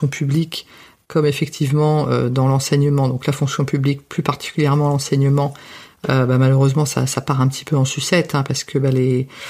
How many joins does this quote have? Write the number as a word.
zero